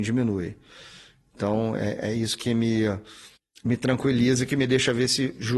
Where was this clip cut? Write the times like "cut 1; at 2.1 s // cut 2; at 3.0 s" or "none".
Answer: cut 1; at 3.4 s